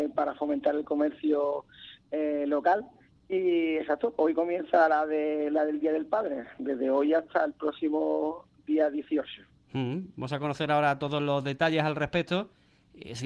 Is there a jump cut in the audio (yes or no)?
no